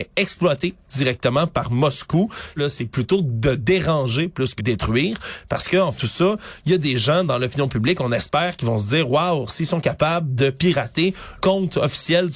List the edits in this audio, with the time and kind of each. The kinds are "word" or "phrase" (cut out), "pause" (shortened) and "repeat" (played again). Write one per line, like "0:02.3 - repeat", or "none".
0:02.6 - phrase
0:04.6 - word
0:06.0 - word
0:11.4 - word